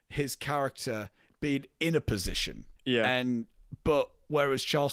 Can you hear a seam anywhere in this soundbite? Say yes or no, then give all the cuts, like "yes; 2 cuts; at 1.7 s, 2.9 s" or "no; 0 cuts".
yes; 1 cut; at 2.8 s